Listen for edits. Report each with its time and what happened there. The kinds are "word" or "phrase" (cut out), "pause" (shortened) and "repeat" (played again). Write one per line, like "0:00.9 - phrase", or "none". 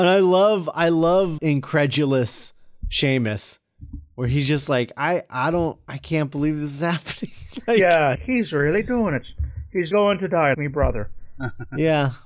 0:01.4 - word
0:08.1 - phrase
0:09.9 - word
0:10.5 - word